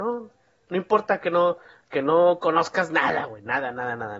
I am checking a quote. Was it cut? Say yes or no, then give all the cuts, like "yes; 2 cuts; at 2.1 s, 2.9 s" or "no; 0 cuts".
no; 0 cuts